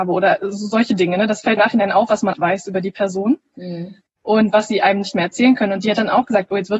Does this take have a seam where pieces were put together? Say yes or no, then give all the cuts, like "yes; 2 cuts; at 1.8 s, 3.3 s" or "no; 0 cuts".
yes; 3 cuts; at 1.6 s, 2.3 s, 4.0 s